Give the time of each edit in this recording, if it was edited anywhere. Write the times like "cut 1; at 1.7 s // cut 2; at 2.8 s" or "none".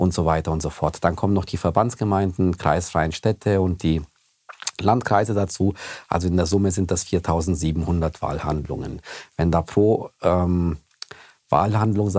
none